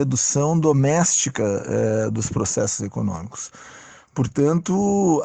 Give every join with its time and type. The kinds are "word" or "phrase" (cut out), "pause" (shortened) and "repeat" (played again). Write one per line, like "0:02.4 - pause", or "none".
none